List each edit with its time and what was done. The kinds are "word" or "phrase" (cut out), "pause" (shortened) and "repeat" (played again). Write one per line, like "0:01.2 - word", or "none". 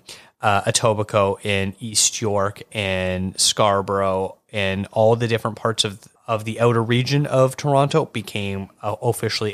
0:06.2 - pause